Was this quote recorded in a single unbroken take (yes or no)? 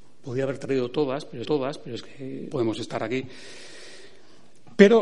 no